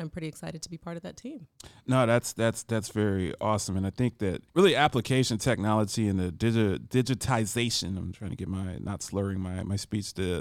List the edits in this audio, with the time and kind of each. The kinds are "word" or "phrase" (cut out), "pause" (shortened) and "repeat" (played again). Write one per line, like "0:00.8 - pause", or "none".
0:04.5 - pause